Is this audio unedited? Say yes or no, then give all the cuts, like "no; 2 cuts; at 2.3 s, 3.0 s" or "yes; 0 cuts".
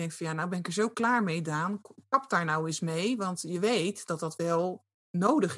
yes; 0 cuts